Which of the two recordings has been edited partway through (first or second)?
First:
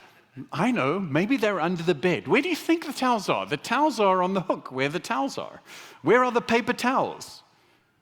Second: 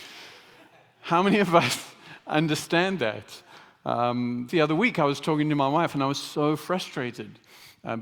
second